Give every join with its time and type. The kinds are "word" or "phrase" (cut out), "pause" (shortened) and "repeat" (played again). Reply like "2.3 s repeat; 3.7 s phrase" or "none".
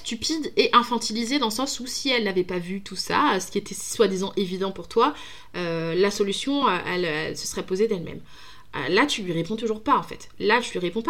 none